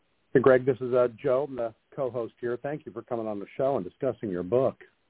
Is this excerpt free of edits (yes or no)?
yes